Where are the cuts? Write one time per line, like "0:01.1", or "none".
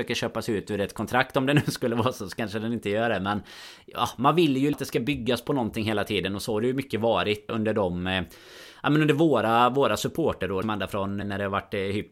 0:04.7
0:07.5
0:10.6
0:11.2